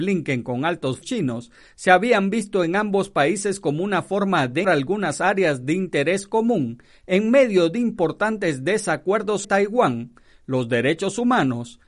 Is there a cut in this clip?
yes; 3 cuts; at 1.0 s, 4.6 s, 9.4 s

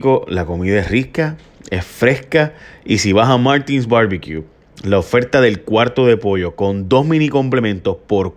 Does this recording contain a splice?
no; 0 cuts

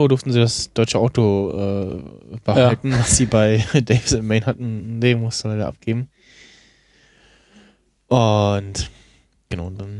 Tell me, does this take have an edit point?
no; 0 cuts

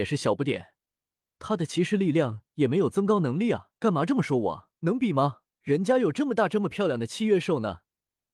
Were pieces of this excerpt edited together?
yes; 3 cuts; at 3.8 s, 4.8 s, 5.5 s

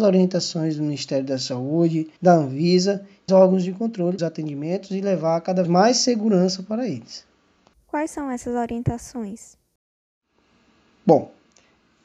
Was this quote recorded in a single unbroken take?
no; 5 cuts; at 2.2 s, 3.3 s, 4.2 s, 5.6 s, 7.7 s

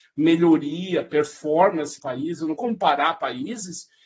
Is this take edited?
yes; 2 cuts; at 2.0 s, 2.6 s

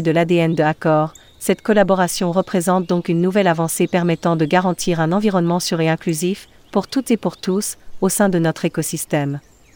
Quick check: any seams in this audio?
no; 0 cuts

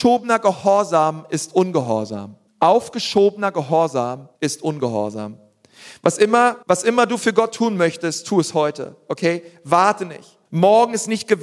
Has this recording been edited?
yes; 4 cuts; at 2.5 s, 4.3 s, 6.6 s, 10.5 s

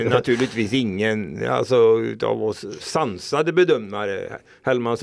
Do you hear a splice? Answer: no; 0 cuts

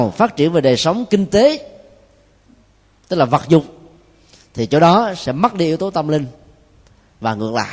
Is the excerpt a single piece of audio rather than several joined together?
yes; 0 cuts

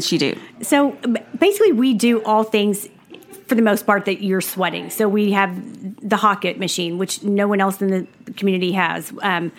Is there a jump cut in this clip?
no; 0 cuts

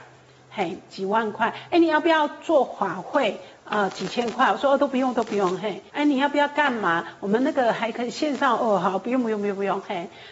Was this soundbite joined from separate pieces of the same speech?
yes; 1 cut; at 5.9 s

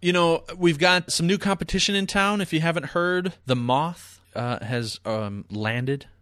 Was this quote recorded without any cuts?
no; 3 cuts; at 1.1 s, 3.4 s, 4.2 s

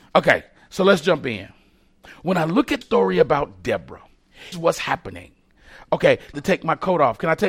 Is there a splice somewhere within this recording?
yes; 3 cuts; at 2.8 s, 4.5 s, 6.3 s

